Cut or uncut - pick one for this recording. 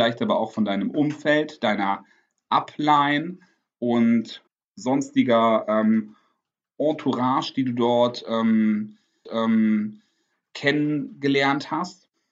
cut